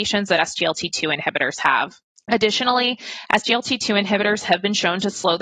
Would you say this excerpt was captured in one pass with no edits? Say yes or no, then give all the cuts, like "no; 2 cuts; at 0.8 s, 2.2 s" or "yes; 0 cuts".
no; 1 cut; at 2.1 s